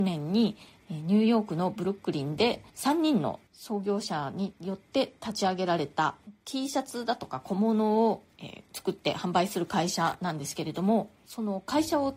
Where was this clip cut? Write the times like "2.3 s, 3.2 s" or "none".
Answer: 2.7 s